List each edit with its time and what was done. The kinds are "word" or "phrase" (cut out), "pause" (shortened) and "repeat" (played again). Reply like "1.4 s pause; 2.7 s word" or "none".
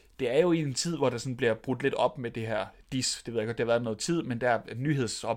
none